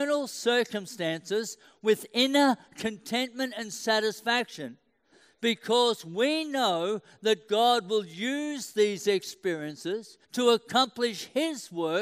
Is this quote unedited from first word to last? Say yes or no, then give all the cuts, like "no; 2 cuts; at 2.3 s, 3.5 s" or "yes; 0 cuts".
no; 1 cut; at 10.2 s